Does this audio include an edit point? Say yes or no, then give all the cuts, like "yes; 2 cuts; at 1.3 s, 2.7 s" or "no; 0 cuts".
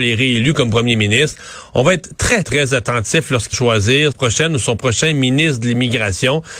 yes; 3 cuts; at 2.4 s, 3.5 s, 4.1 s